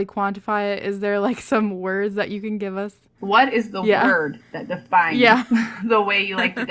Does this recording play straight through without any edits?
yes; 0 cuts

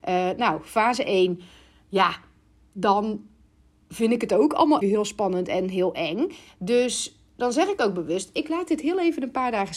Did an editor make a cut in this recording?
yes; 1 cut; at 4.8 s

